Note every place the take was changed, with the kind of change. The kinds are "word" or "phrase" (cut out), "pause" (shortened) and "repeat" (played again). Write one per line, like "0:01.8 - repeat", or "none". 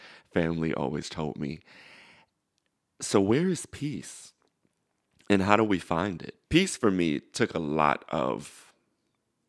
0:06.4 - pause